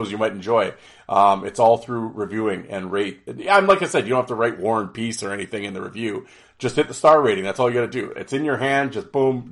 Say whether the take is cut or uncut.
uncut